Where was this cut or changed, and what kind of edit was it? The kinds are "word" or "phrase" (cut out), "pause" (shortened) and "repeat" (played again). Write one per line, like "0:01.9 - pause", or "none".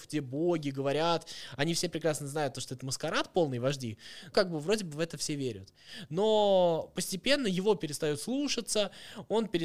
0:04.3 - word